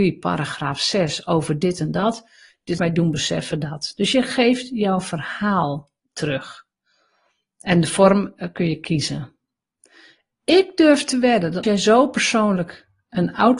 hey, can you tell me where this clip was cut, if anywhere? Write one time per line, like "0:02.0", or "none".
0:02.8
0:11.6